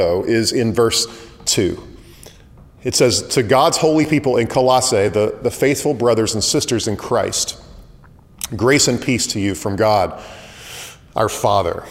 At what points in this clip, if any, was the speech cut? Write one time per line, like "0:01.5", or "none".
none

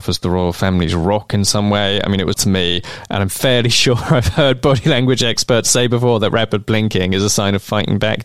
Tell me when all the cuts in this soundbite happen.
0:02.3

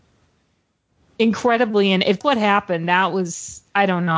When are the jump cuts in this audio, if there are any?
0:02.2

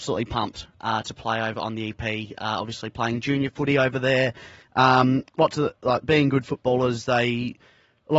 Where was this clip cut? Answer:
none

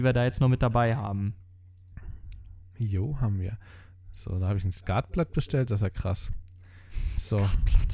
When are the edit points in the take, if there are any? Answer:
none

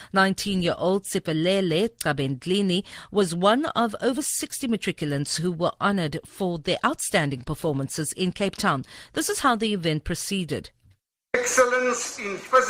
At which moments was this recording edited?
none

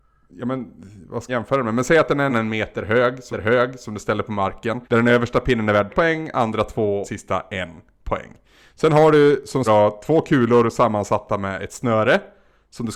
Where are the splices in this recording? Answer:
0:01.3
0:02.3
0:03.3
0:04.8
0:05.9
0:07.0
0:09.7

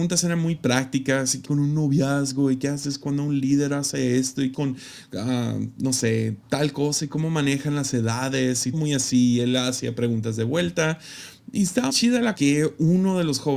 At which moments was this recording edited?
0:01.4
0:04.5
0:06.4
0:08.7
0:11.9
0:12.3

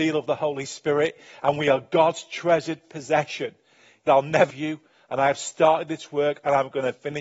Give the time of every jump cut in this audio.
0:04.1
0:04.5

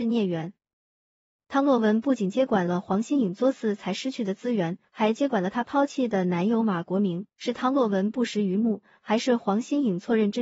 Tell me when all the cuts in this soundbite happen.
0:07.3

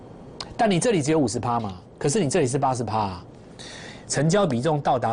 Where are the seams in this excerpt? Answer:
0:04.1

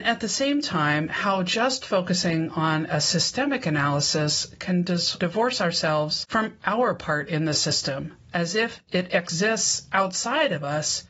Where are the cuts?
none

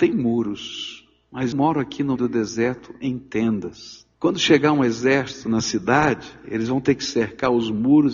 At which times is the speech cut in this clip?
0:01.5
0:02.2
0:04.1

